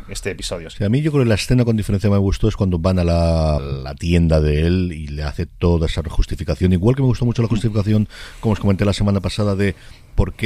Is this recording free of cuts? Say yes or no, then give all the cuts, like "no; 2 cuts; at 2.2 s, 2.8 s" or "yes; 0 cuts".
no; 1 cut; at 3.6 s